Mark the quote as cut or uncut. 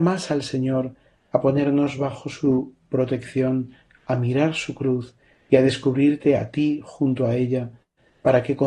uncut